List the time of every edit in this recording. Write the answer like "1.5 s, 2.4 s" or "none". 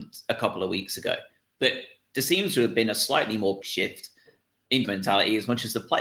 3.6 s, 4.8 s